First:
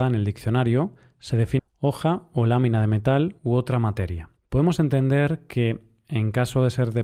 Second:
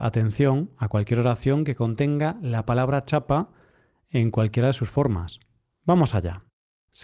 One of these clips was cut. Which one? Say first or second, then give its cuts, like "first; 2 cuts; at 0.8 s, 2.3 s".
first; 3 cuts; at 1.6 s, 3.4 s, 4.4 s